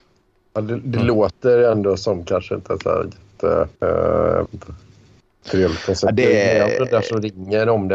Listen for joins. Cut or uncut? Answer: cut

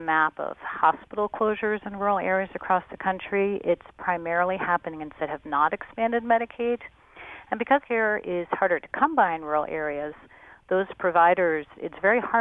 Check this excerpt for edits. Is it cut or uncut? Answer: cut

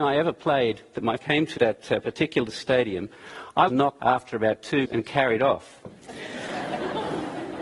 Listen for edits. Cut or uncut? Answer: cut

